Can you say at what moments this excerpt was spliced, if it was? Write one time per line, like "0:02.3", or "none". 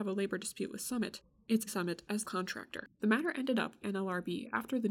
0:01.7
0:02.2
0:02.9
0:03.8